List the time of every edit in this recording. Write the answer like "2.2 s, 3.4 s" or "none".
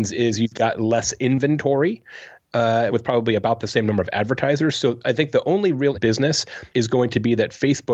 2.9 s, 5.9 s, 6.7 s

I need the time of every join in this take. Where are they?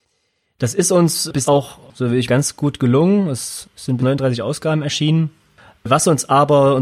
1.4 s, 2.3 s, 4.0 s

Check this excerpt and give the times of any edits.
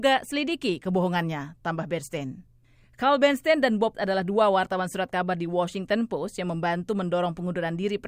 3.9 s

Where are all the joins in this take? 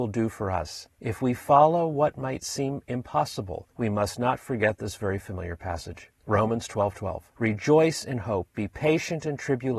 0.9 s, 3.7 s, 7.3 s

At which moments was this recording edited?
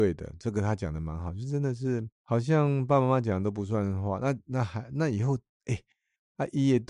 2.1 s

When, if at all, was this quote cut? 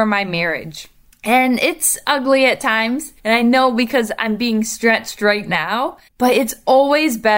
3.2 s, 6.1 s

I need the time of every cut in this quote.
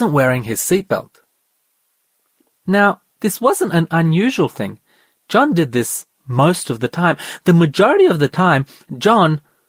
none

